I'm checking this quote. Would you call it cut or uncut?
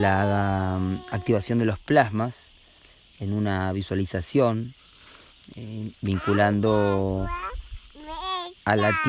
cut